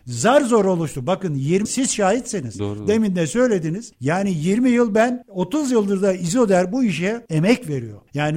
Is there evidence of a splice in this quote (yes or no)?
yes